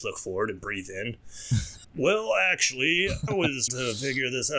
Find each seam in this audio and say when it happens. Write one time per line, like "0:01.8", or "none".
0:01.8
0:03.3
0:03.7